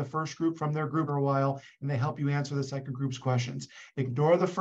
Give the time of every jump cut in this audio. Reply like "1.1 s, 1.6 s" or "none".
1.1 s